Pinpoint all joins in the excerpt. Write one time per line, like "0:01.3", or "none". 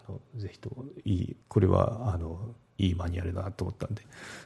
0:01.4